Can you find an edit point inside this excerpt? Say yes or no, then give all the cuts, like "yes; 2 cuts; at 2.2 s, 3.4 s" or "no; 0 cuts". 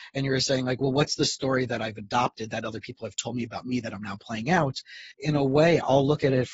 yes; 1 cut; at 5.1 s